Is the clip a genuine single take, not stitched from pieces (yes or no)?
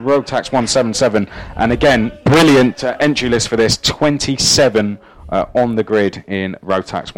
yes